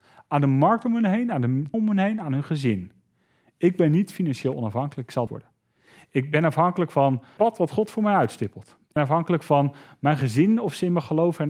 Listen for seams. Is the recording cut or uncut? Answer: cut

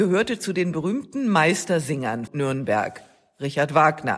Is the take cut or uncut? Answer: cut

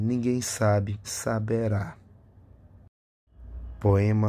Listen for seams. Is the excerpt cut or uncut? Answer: cut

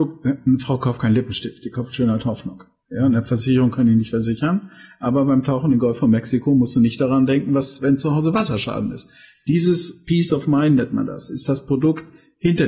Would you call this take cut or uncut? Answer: uncut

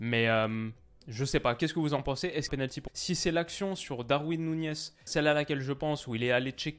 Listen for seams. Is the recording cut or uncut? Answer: cut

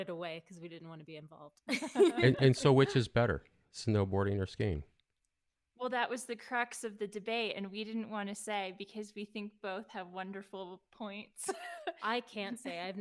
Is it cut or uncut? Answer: uncut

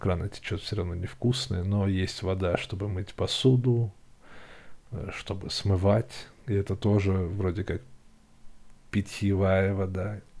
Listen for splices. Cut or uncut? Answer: uncut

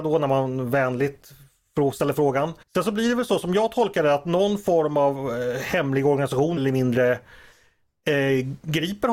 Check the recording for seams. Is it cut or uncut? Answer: cut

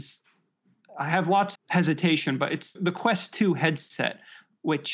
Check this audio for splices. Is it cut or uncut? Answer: cut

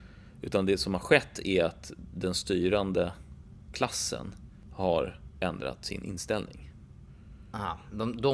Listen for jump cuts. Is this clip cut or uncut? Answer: uncut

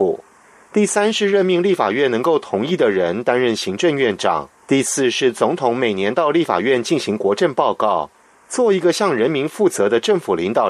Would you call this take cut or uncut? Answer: cut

